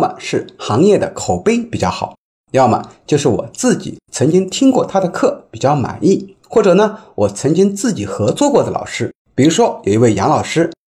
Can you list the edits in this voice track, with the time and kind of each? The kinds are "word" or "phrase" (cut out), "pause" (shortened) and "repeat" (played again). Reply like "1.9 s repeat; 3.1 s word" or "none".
6.4 s pause; 9.2 s pause